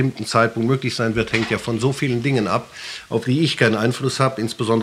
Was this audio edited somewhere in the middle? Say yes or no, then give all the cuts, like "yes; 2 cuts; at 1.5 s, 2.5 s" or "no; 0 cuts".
no; 0 cuts